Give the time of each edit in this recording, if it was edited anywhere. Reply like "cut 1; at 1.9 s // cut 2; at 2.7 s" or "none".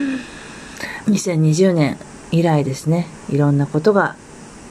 cut 1; at 1.0 s